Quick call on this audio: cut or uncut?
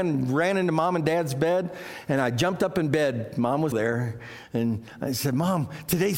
cut